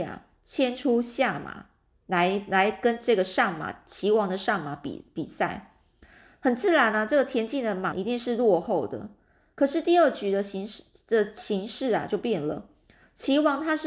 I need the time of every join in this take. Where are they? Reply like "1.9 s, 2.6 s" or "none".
7.9 s